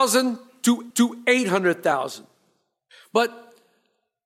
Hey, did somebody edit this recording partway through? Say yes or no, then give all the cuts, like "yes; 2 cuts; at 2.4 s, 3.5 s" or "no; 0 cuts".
yes; 1 cut; at 0.9 s